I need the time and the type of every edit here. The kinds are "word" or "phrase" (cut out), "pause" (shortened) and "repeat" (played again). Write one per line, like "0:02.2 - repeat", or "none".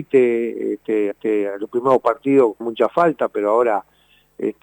0:01.1 - repeat
0:02.6 - word